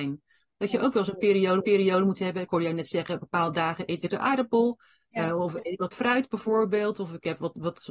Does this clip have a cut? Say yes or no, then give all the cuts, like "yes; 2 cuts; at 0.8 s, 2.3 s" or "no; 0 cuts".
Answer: yes; 3 cuts; at 1.6 s, 4.1 s, 5.9 s